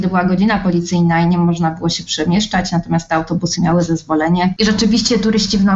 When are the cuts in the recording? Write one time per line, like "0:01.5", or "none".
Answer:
none